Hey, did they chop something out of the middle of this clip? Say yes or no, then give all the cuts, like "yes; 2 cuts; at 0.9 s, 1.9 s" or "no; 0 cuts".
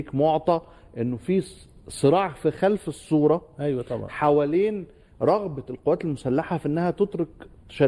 no; 0 cuts